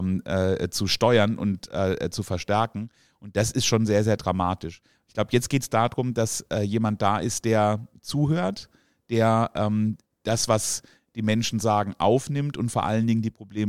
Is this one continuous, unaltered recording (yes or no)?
yes